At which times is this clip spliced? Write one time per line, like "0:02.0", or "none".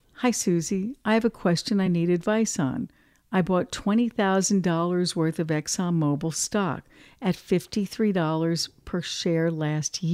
none